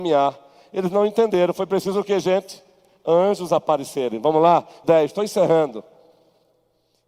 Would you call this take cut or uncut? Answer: cut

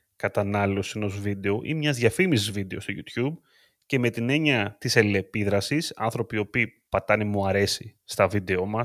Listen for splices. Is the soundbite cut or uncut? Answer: cut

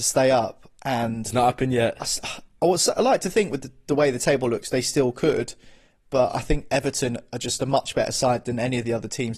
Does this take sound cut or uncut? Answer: uncut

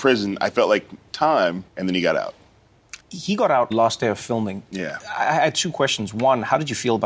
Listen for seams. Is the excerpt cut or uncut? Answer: cut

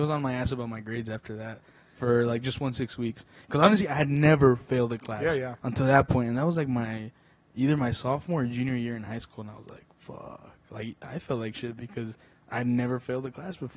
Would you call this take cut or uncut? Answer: uncut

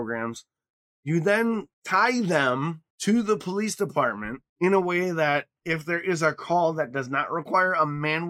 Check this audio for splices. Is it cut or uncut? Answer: cut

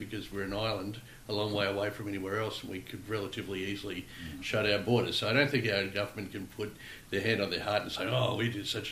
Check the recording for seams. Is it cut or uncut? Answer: uncut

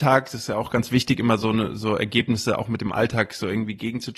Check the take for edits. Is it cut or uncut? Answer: uncut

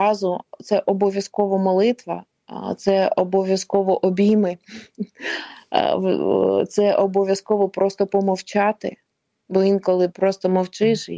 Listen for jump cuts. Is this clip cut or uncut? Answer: cut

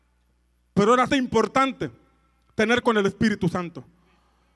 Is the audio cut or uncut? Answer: cut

